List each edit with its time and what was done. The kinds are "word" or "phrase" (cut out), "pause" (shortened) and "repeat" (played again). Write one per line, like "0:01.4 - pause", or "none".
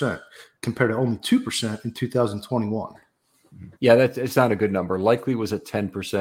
0:03.8 - pause